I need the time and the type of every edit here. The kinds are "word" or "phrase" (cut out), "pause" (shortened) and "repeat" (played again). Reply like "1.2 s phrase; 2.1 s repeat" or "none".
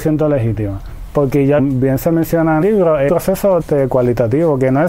1.6 s phrase; 2.6 s phrase; 3.1 s word; 3.6 s word